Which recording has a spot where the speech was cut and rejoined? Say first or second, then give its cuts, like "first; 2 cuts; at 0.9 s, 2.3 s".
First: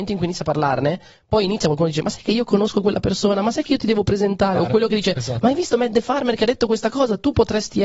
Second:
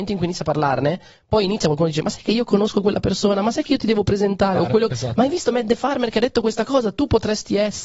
second; 1 cut; at 4.9 s